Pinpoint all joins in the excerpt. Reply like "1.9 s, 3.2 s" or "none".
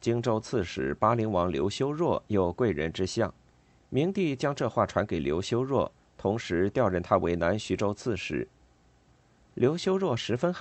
3.5 s